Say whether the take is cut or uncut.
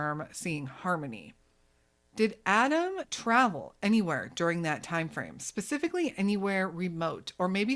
uncut